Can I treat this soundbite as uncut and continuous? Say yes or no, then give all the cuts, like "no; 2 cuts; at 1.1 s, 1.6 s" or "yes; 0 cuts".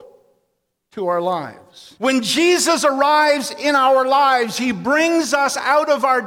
no; 1 cut; at 2.0 s